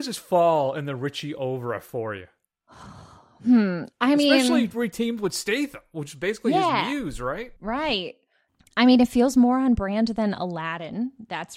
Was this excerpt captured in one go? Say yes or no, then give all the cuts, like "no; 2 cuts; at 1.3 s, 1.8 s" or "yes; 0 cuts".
no; 1 cut; at 7.6 s